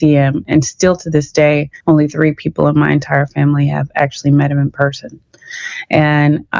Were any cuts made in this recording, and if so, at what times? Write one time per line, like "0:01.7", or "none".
0:01.8